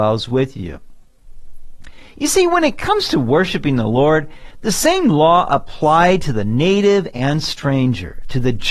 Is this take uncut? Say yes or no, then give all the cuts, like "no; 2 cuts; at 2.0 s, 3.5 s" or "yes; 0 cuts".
yes; 0 cuts